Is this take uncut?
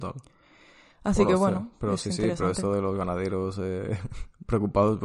yes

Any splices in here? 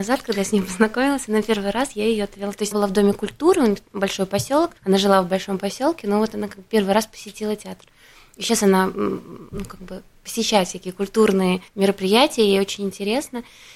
yes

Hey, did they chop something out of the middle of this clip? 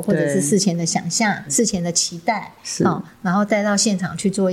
yes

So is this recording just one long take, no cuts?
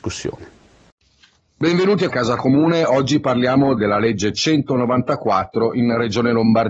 no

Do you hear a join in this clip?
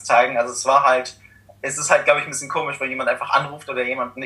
no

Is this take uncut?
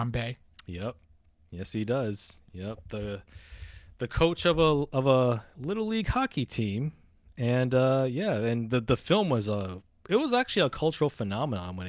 yes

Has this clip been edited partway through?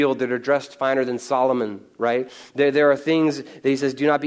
no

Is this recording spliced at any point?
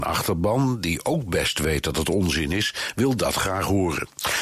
no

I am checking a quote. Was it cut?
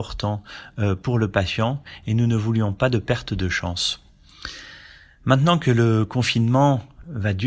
no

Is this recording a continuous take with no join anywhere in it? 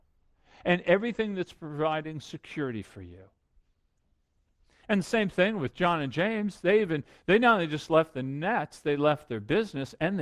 yes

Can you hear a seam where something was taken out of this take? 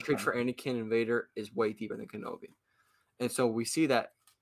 no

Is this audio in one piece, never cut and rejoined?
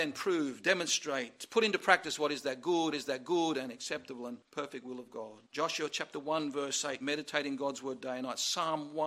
no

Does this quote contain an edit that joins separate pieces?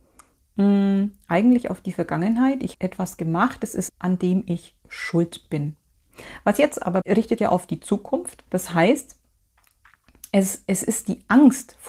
yes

